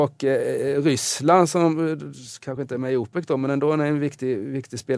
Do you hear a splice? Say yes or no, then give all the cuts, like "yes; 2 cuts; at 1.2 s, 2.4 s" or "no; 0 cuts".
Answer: no; 0 cuts